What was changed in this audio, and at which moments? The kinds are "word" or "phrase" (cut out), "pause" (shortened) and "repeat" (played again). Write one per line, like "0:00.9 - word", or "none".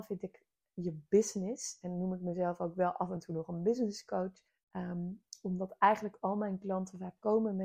0:04.5 - pause